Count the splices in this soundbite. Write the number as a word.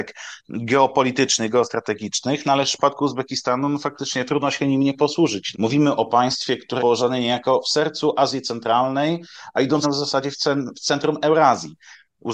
three